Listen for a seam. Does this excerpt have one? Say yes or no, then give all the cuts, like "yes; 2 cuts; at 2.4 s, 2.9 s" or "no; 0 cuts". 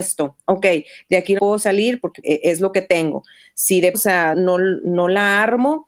yes; 4 cuts; at 1.4 s, 2.2 s, 3.9 s, 4.3 s